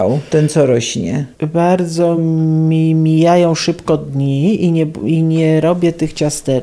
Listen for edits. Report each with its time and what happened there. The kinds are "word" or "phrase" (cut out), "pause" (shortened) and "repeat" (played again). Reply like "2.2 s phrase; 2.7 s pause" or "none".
none